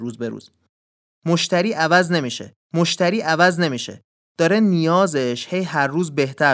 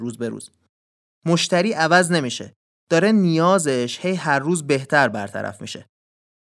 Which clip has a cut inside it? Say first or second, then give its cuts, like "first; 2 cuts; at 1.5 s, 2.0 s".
first; 1 cut; at 2.7 s